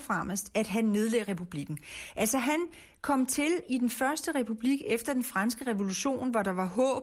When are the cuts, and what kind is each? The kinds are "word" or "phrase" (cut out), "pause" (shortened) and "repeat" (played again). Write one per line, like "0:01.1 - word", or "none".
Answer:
none